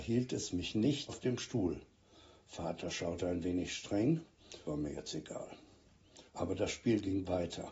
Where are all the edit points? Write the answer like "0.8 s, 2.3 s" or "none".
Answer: 1.1 s, 4.7 s, 6.3 s